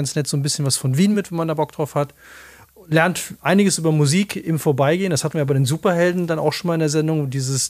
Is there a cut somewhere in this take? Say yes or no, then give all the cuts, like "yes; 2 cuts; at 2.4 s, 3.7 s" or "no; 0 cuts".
no; 0 cuts